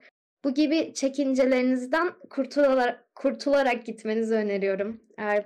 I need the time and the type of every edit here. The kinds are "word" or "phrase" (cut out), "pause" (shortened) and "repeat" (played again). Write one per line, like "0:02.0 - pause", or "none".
none

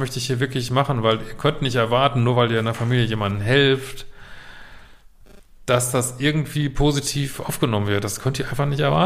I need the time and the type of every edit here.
none

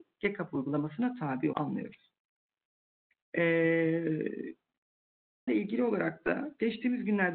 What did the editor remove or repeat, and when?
0:01.5 - word
0:05.5 - word

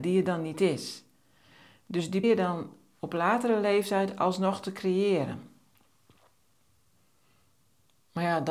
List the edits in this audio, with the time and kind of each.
0:02.2 - word

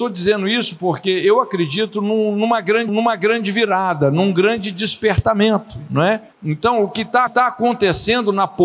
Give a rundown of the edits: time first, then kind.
0:02.9 - repeat
0:06.3 - pause
0:07.3 - repeat

